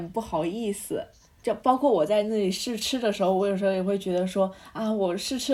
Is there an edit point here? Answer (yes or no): no